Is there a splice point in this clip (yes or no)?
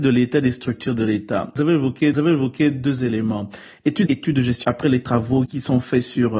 yes